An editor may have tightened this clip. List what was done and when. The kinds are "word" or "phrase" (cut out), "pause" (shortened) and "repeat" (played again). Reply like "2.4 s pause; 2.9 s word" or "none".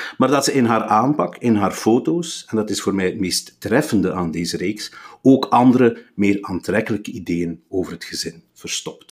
none